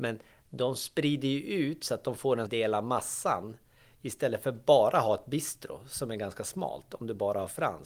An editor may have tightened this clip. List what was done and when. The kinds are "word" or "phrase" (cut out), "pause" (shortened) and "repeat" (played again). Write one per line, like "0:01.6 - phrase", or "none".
0:02.5 - word